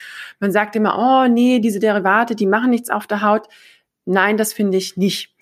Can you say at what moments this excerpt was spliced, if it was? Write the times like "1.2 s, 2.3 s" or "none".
none